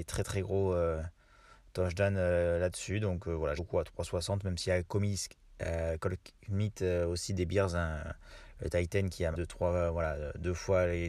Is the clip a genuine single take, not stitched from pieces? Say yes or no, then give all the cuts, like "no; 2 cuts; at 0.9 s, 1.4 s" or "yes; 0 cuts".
no; 3 cuts; at 3.6 s, 4.8 s, 9.3 s